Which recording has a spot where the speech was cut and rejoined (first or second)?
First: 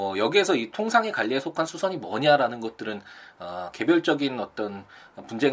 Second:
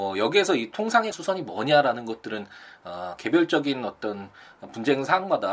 second